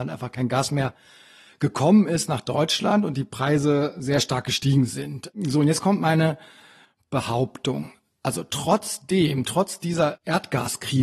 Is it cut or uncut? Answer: uncut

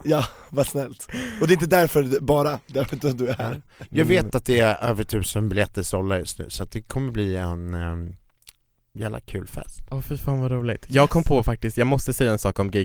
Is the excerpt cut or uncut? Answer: uncut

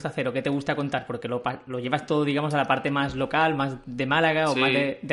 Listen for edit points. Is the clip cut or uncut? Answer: uncut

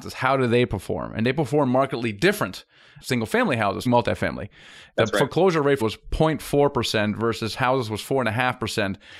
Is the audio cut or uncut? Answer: cut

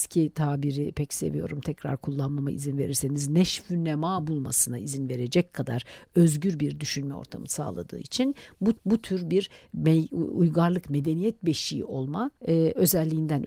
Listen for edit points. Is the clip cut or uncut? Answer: cut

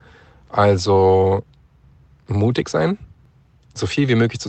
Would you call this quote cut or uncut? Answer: uncut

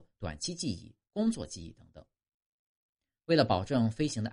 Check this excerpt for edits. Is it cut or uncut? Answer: uncut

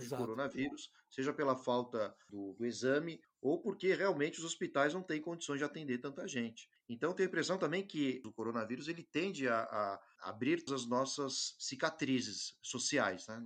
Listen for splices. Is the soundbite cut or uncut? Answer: cut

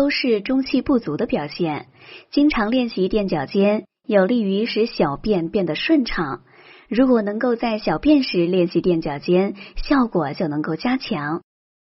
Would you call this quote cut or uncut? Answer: uncut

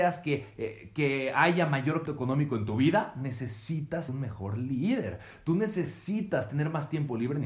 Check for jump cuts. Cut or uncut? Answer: cut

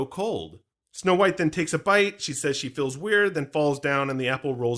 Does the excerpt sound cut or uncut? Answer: uncut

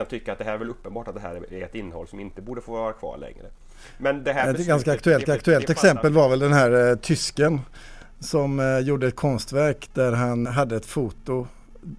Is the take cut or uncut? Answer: cut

